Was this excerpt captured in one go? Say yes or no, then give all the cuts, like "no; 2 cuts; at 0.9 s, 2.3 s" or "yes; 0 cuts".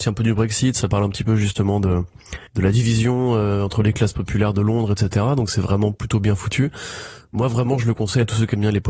no; 1 cut; at 2.5 s